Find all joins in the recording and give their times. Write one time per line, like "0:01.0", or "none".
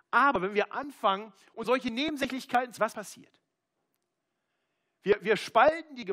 0:01.6
0:02.8